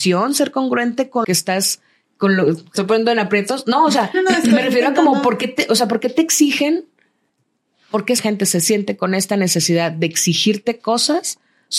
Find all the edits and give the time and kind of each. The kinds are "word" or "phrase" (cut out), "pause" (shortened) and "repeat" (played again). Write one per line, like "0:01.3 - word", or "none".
0:01.2 - word
0:02.7 - phrase
0:04.1 - word
0:08.2 - phrase